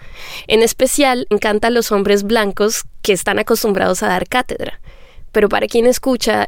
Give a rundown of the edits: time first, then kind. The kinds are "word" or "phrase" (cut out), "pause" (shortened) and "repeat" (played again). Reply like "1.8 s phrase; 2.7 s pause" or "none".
1.3 s word